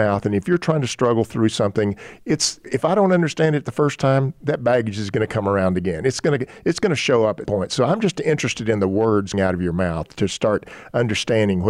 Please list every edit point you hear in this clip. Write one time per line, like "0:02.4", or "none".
0:02.6
0:07.5
0:09.3

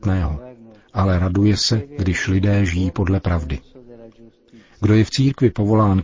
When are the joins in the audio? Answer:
none

